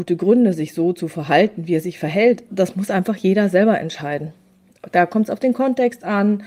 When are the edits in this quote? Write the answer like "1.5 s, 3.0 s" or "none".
2.5 s